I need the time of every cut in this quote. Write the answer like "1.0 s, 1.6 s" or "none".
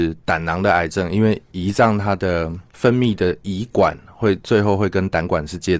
1.4 s